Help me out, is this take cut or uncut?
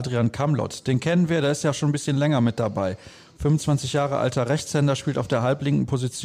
uncut